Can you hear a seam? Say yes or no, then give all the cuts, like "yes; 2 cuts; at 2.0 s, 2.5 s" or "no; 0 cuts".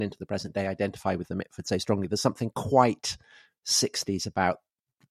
no; 0 cuts